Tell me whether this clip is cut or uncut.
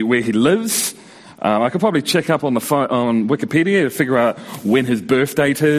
uncut